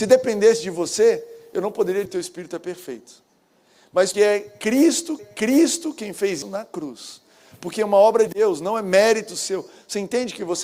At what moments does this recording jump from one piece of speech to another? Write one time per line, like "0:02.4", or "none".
0:02.1
0:04.1
0:05.2
0:06.4
0:08.3